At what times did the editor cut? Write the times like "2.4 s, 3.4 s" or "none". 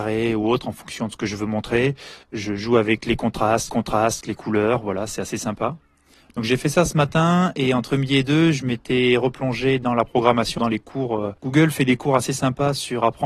2.2 s, 3.7 s, 10.6 s, 11.4 s